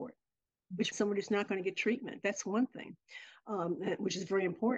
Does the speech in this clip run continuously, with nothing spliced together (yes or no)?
no